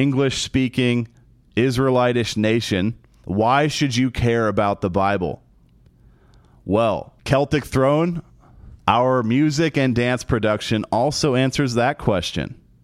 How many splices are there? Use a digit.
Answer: 2